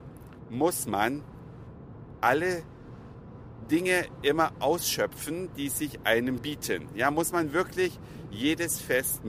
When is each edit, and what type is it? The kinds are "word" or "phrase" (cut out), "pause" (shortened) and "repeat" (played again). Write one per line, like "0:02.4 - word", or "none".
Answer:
0:06.4 - word